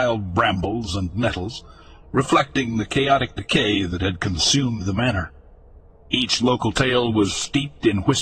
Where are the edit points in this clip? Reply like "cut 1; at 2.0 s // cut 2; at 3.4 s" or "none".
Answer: none